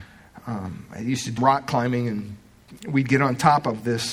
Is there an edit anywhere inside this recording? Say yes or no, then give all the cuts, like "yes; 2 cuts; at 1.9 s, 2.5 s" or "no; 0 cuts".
yes; 1 cut; at 1.4 s